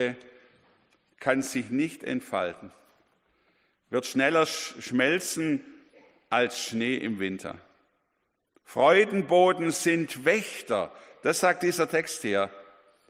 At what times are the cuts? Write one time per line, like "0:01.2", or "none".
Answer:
none